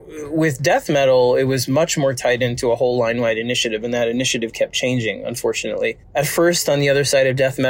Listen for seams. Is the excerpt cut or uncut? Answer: cut